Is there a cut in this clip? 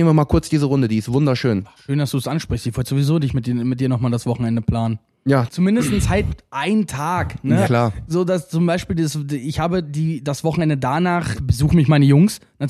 yes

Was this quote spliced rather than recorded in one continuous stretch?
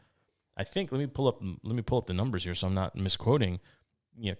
no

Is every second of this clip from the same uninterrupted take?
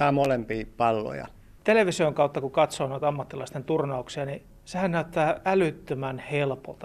yes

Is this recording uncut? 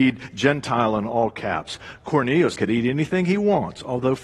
no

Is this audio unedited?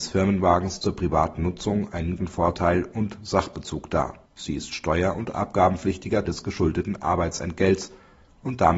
no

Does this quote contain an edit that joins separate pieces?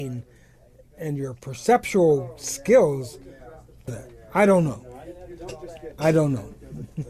yes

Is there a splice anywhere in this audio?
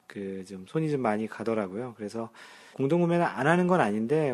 yes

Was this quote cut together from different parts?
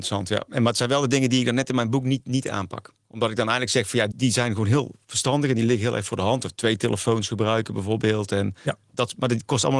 yes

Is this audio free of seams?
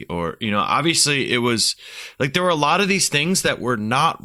yes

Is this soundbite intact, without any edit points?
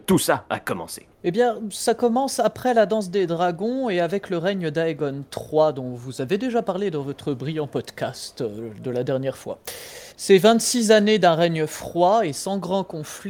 no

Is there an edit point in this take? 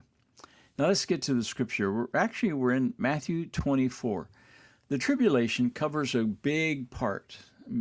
no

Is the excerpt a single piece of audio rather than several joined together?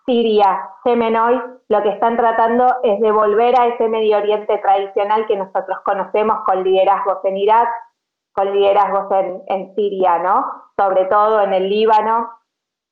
yes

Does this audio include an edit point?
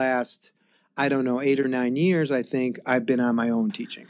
yes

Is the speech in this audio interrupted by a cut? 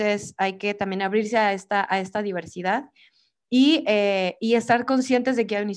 no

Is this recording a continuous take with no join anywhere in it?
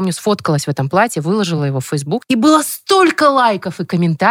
yes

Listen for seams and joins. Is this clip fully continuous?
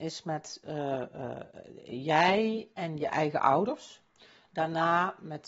yes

